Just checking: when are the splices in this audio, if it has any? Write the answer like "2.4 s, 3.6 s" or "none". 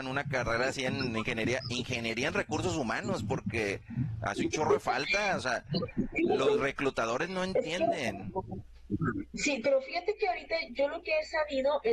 none